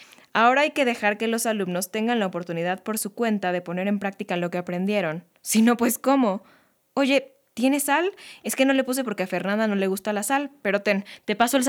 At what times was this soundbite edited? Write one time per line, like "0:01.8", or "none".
none